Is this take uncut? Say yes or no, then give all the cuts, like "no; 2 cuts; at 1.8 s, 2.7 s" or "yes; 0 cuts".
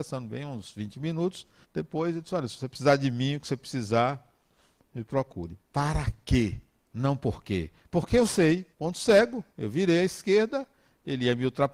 no; 4 cuts; at 1.6 s, 5.6 s, 8.7 s, 9.5 s